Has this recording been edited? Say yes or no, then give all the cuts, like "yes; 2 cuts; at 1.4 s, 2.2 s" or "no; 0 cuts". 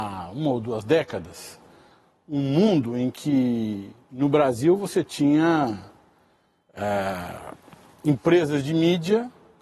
no; 0 cuts